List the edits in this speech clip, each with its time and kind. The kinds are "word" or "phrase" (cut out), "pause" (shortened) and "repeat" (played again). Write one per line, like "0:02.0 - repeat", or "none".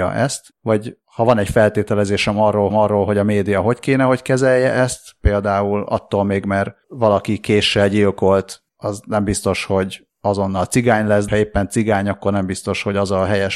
0:02.7 - repeat
0:11.3 - word